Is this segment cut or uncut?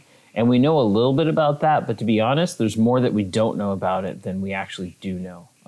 uncut